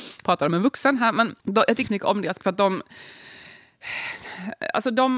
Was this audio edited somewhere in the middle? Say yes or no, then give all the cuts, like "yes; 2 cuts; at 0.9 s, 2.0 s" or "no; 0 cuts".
yes; 3 cuts; at 1.4 s, 1.9 s, 2.4 s